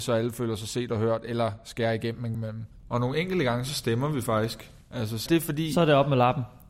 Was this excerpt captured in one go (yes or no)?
no